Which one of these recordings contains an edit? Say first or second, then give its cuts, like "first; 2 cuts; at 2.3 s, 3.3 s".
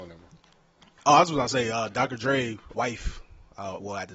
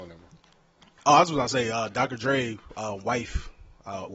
first; 1 cut; at 2.7 s